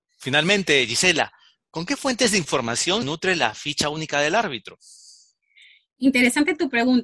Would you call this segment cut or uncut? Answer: cut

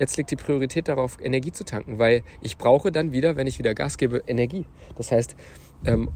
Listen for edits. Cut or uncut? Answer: uncut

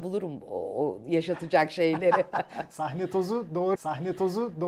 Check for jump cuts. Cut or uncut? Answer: cut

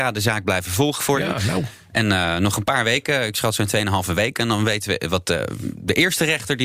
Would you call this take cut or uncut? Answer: uncut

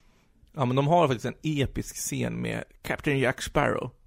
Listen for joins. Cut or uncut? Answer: uncut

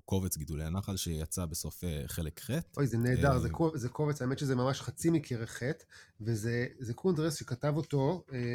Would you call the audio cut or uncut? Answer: uncut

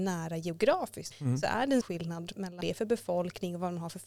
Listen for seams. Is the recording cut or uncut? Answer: cut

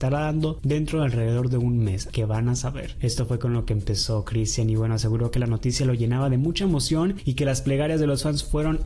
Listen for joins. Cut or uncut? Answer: uncut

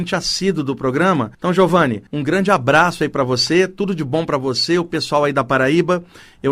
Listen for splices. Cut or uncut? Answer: cut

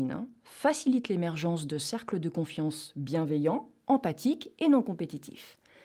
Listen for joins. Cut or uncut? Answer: uncut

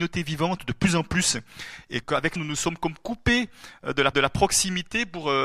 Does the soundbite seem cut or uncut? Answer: cut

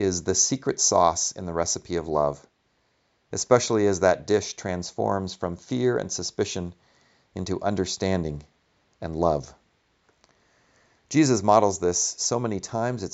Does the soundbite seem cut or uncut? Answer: uncut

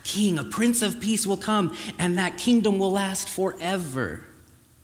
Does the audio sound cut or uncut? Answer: uncut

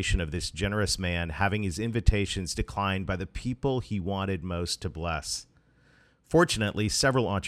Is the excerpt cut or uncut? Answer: uncut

